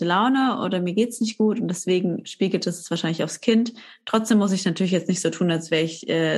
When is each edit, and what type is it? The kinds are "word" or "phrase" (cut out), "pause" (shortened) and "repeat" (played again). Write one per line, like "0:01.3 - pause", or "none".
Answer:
none